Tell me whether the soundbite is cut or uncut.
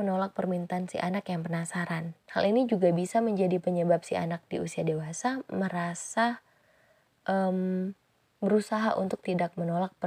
cut